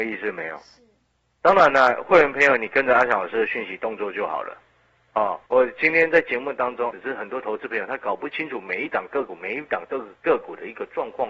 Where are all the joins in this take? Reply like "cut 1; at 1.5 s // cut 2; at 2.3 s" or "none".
cut 1; at 5.5 s // cut 2; at 6.9 s